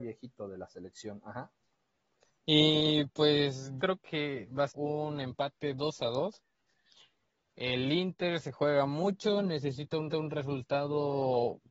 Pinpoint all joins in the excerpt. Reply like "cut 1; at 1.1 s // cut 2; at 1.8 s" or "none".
cut 1; at 3.8 s // cut 2; at 4.7 s // cut 3; at 10.1 s